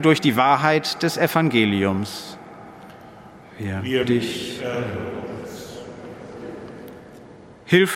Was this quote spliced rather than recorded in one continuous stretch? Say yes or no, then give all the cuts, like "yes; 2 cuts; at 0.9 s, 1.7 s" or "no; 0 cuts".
yes; 1 cut; at 4.0 s